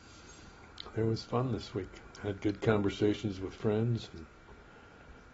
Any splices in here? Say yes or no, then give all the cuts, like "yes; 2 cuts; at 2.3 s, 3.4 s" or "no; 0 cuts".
yes; 1 cut; at 2.1 s